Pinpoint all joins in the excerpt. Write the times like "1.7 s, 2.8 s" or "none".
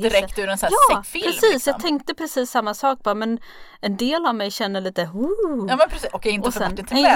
1.0 s